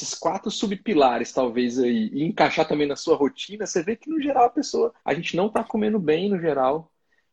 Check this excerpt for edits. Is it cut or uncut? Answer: cut